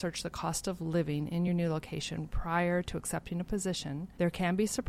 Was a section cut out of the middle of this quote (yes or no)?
no